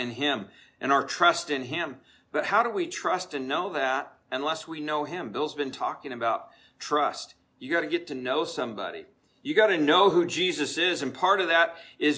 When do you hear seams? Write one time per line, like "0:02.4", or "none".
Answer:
none